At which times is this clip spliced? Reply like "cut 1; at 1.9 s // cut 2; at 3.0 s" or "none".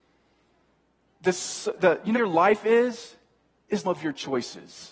cut 1; at 1.8 s // cut 2; at 2.1 s // cut 3; at 3.8 s